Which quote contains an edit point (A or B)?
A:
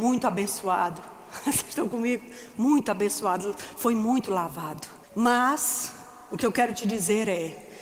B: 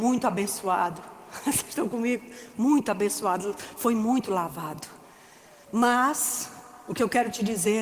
A